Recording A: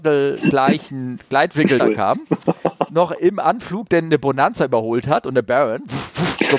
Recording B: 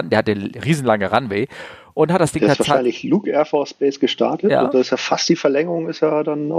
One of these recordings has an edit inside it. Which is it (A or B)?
A